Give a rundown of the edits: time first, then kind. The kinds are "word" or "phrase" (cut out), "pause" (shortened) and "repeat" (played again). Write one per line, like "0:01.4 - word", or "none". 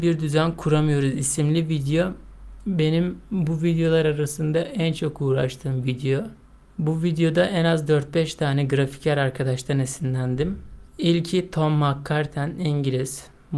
0:06.4 - pause
0:10.9 - pause